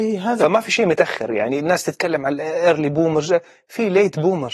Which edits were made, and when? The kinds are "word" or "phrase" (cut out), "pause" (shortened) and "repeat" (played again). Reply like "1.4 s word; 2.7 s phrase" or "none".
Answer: none